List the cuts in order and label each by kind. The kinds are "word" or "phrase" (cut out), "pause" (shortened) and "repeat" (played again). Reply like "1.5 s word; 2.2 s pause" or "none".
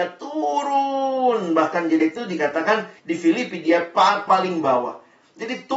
2.0 s word; 3.0 s pause; 4.3 s phrase

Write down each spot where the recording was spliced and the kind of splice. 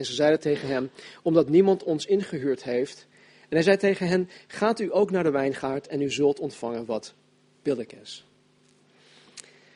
none

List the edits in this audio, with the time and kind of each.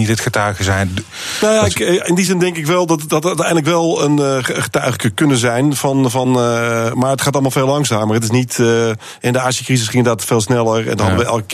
none

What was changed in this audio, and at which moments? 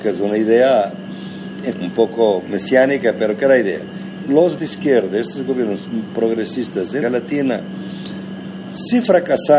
1.7 s word; 4.2 s word; 4.6 s word; 7.0 s word

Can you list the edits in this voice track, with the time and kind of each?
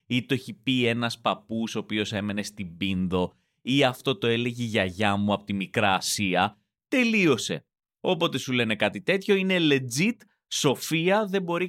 none

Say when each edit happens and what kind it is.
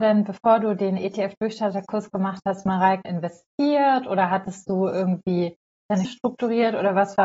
3.0 s word; 6.0 s word

